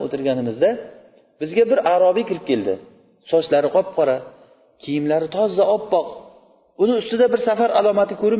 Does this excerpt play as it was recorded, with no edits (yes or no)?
yes